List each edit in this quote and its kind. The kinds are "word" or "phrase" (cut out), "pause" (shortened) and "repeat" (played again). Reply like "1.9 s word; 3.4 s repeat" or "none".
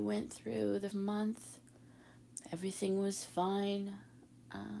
0.9 s word

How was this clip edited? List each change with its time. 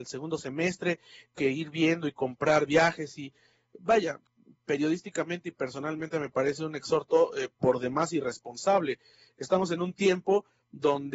none

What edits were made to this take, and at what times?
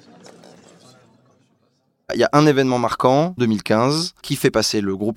3.4 s word

